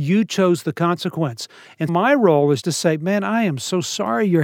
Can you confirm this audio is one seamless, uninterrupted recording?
no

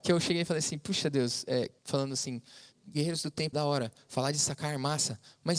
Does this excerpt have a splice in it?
yes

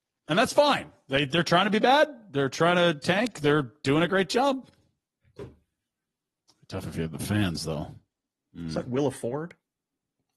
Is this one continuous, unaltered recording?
yes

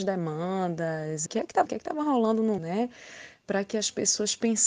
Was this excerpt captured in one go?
no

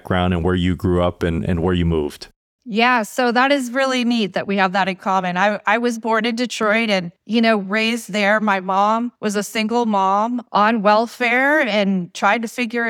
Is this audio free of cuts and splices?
yes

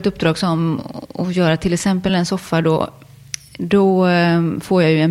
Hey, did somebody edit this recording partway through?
no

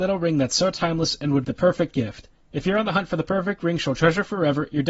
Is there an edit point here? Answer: yes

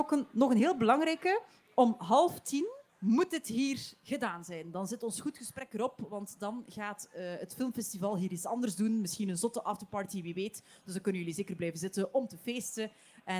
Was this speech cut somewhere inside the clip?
yes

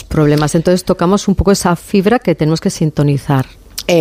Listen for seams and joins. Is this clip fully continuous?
yes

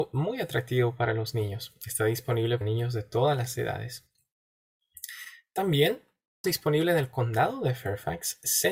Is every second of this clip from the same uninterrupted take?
no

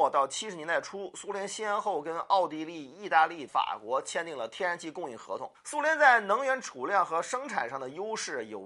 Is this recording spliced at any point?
yes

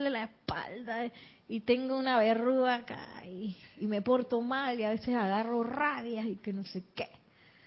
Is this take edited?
no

